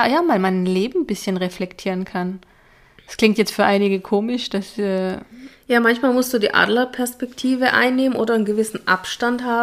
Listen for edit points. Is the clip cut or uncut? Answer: uncut